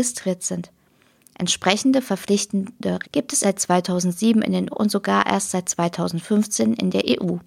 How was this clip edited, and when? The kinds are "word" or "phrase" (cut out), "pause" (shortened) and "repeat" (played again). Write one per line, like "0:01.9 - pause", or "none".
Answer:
0:03.0 - word
0:03.4 - word
0:04.7 - word